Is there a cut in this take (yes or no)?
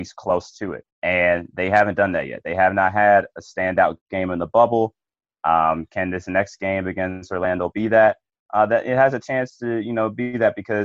no